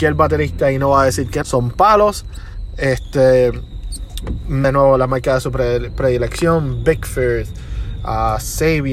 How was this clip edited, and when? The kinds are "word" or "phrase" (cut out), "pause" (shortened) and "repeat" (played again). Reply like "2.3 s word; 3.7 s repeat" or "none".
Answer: 1.4 s word; 4.6 s word